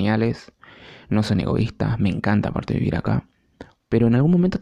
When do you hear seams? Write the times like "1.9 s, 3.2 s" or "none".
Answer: none